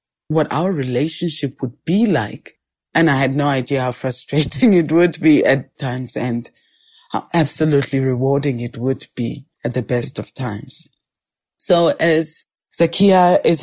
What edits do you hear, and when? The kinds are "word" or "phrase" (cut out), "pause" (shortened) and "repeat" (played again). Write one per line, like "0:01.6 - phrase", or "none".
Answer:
0:05.8 - phrase
0:09.5 - pause